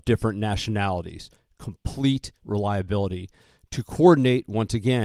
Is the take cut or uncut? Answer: cut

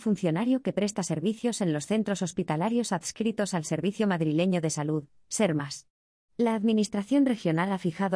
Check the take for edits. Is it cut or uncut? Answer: uncut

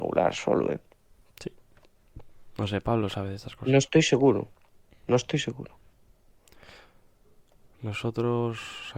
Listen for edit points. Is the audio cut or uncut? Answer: uncut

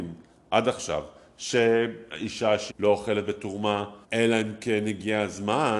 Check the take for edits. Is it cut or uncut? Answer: cut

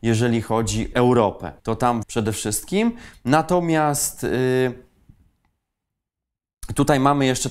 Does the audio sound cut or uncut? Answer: cut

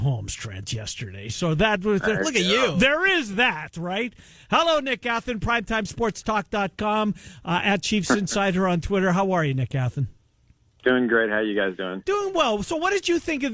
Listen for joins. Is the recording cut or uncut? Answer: uncut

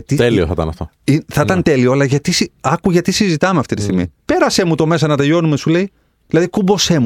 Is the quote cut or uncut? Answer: uncut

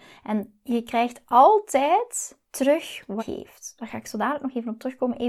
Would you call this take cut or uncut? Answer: cut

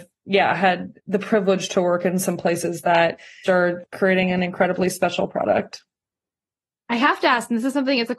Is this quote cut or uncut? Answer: cut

